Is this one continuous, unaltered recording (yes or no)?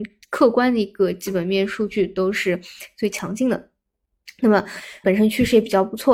no